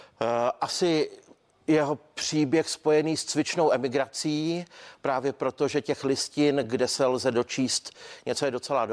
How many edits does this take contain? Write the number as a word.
zero